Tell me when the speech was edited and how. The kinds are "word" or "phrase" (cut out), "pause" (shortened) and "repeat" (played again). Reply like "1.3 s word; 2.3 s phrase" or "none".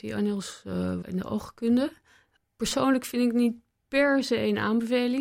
1.0 s word